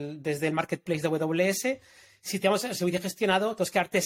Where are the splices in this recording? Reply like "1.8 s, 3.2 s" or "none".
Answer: none